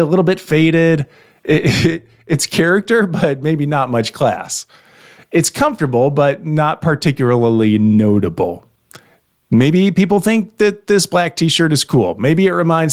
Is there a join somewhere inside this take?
no; 0 cuts

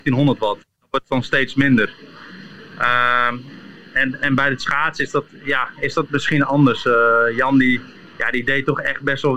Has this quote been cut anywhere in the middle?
yes; 1 cut; at 8.0 s

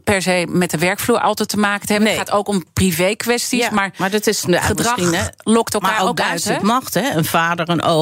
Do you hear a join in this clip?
no; 0 cuts

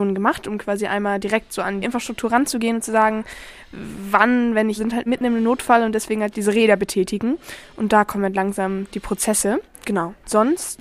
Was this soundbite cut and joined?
yes; 4 cuts; at 1.8 s, 4.8 s, 5.1 s, 6.3 s

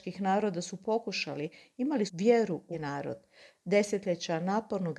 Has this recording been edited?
yes; 2 cuts; at 2.1 s, 2.7 s

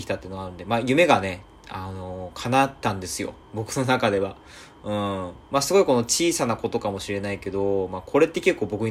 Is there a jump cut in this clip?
yes; 2 cuts; at 3.4 s, 5.4 s

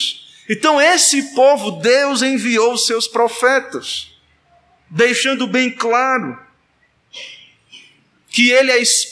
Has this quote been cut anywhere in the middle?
no; 0 cuts

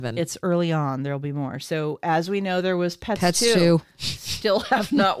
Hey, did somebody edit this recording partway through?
no; 0 cuts

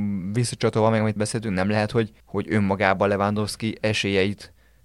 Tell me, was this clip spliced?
yes; 2 cuts; at 1.2 s, 2.2 s

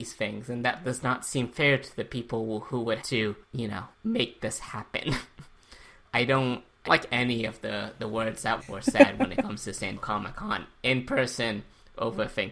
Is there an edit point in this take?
yes; 7 cuts; at 3.0 s, 3.4 s, 3.9 s, 6.0 s, 6.9 s, 8.6 s, 10.0 s

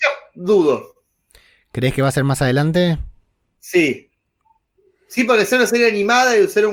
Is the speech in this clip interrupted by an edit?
no; 0 cuts

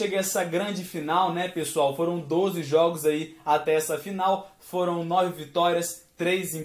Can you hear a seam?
no; 0 cuts

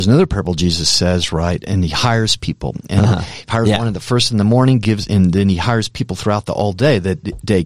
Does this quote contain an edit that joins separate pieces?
yes; 1 cut; at 5.1 s

